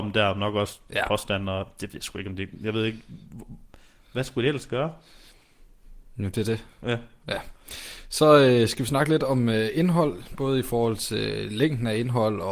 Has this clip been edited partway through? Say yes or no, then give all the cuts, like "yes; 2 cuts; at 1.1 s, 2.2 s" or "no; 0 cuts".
no; 0 cuts